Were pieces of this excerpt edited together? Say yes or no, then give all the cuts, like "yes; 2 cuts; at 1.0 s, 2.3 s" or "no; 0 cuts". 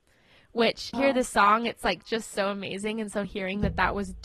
yes; 2 cuts; at 0.9 s, 3.2 s